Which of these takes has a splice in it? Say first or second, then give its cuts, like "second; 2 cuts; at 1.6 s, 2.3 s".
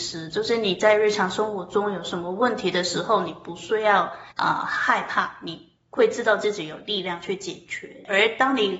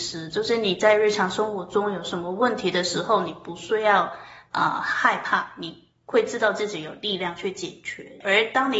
first; 1 cut; at 4.3 s